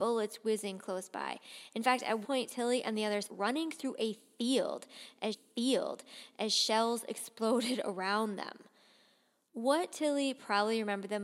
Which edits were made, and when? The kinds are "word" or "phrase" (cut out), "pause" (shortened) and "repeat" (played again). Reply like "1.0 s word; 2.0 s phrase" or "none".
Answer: 2.2 s word; 3.3 s phrase; 5.3 s repeat